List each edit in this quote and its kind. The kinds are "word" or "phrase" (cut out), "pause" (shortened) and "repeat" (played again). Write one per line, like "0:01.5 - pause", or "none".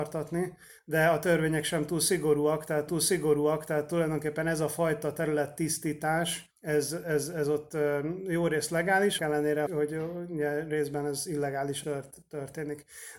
0:02.9 - repeat
0:06.5 - pause
0:09.2 - word
0:09.7 - word
0:11.8 - word